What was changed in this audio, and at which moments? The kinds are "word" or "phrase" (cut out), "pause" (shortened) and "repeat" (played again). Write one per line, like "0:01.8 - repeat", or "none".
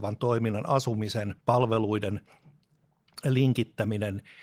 0:01.4 - pause